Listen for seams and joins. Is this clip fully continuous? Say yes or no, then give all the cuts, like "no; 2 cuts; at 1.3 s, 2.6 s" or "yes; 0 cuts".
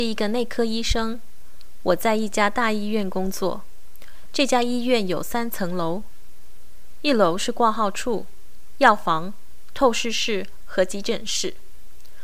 yes; 0 cuts